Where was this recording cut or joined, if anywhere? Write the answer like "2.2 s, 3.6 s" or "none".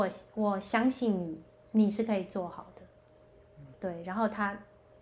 1.5 s, 3.7 s